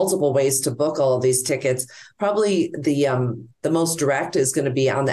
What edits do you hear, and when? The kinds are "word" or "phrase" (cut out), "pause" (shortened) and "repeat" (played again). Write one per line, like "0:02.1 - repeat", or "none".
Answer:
none